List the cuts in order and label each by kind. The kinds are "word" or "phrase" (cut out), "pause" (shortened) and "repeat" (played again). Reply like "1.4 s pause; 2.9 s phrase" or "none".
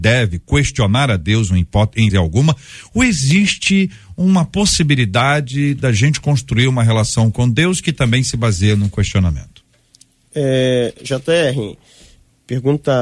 2.1 s word